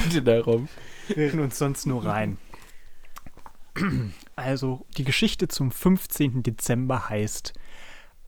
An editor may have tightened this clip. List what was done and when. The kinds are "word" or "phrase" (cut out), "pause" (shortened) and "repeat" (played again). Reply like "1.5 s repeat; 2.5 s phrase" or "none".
1.3 s word